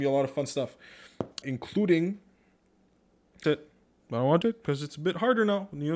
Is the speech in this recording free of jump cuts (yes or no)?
no